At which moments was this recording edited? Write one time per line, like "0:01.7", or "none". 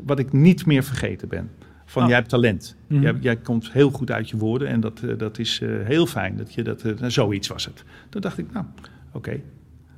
none